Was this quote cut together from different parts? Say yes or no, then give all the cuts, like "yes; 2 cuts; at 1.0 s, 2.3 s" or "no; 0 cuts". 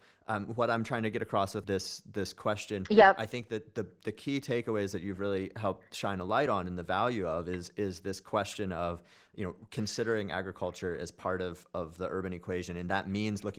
no; 0 cuts